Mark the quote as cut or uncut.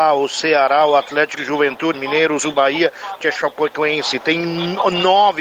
cut